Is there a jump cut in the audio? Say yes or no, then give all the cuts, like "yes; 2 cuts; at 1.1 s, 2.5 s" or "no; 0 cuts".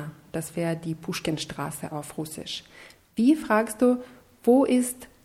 no; 0 cuts